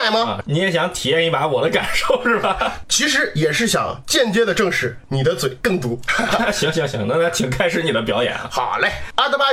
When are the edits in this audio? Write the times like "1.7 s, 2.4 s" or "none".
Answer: none